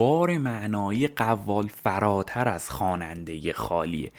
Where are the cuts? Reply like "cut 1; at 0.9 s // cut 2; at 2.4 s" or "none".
none